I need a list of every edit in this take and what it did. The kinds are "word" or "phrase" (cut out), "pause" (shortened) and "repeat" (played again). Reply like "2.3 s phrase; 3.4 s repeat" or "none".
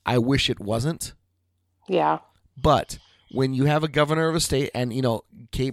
none